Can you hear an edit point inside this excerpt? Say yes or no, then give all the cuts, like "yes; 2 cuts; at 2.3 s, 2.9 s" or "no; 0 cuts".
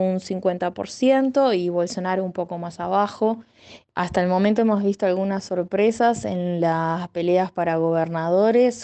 no; 0 cuts